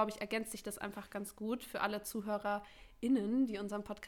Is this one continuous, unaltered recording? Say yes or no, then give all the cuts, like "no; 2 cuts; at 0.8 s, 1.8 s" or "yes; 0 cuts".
yes; 0 cuts